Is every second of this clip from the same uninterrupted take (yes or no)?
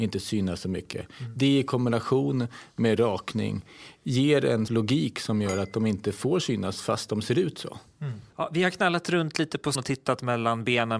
no